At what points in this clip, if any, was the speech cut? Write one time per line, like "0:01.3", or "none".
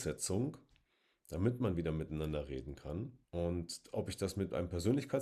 0:03.2